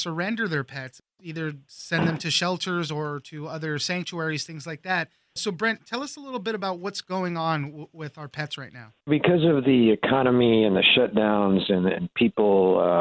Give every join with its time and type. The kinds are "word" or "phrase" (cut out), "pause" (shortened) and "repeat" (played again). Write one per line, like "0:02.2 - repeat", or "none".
0:09.0 - pause